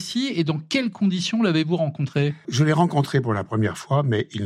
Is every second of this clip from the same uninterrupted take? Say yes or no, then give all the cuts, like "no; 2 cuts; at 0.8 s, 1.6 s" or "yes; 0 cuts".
no; 1 cut; at 2.4 s